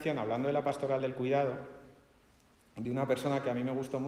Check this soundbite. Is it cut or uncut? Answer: uncut